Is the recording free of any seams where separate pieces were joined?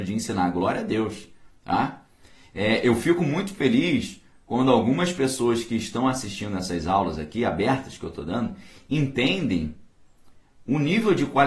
yes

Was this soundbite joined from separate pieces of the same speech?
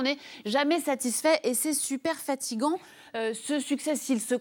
no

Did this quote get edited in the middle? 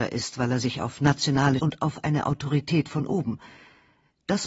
yes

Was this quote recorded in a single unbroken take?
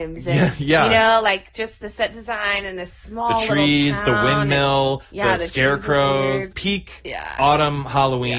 no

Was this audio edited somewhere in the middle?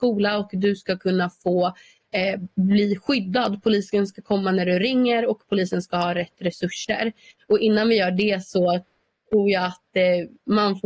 no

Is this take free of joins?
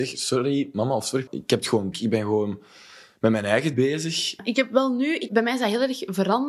no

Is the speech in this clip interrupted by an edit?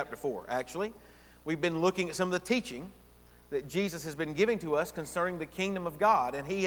no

